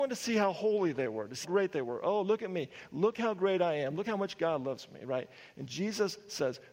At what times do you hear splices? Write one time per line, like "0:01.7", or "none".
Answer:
0:01.4